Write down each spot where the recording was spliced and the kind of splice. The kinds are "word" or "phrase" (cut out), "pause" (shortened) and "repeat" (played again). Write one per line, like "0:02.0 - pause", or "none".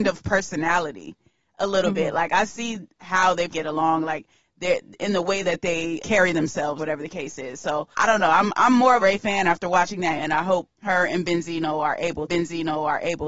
0:03.5 - word
0:06.0 - word
0:06.8 - word
0:07.9 - pause
0:09.0 - phrase
0:10.2 - word
0:10.7 - pause
0:12.3 - repeat